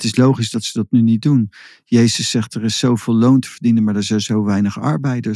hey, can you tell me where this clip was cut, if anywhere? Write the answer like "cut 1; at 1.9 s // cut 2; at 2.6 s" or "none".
none